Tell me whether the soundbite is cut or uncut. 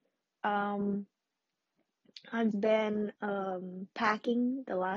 cut